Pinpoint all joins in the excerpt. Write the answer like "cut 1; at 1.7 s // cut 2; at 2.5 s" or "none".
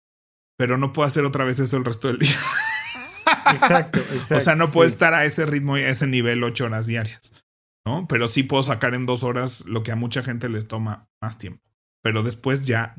none